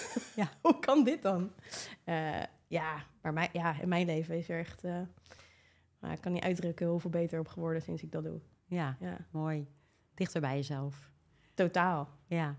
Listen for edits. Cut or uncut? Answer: uncut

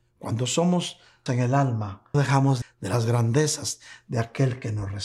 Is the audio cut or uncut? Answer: cut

